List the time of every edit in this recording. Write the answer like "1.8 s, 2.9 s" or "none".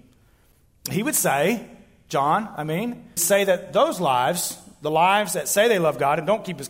3.2 s

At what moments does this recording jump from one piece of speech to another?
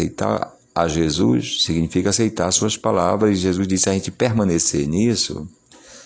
none

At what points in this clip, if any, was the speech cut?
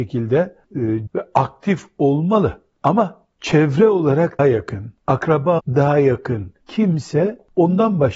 1.1 s, 3.4 s, 4.4 s, 5.6 s

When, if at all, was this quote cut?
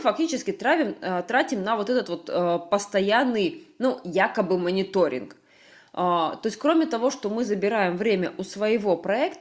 none

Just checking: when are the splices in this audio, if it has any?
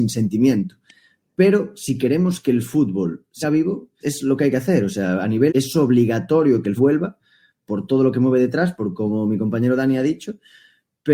3.4 s, 4.0 s, 5.5 s, 6.8 s

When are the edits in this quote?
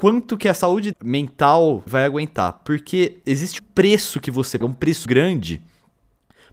0.9 s, 1.9 s, 3.6 s, 4.6 s, 5.1 s

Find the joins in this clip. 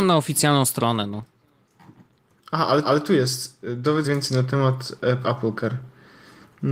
2.8 s, 4.0 s, 5.2 s

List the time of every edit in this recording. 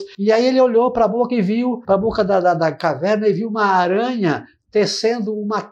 none

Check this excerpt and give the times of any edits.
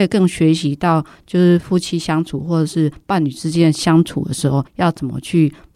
4.7 s

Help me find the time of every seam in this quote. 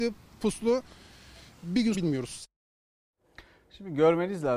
1.9 s

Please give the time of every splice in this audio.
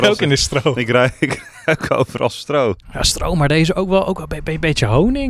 none

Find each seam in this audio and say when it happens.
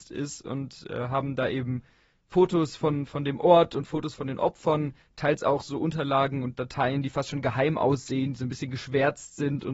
none

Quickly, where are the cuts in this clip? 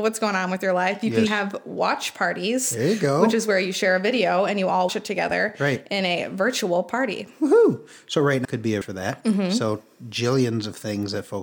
1.3 s, 4.9 s, 8.4 s, 8.8 s

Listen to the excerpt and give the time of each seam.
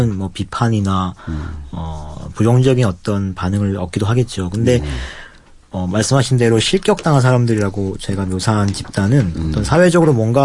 none

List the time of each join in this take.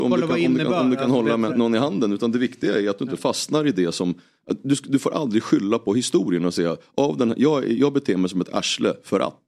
1.5 s

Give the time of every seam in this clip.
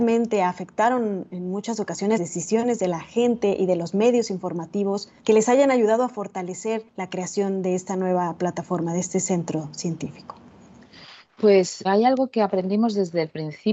2.2 s, 5.2 s, 6.9 s, 11.8 s

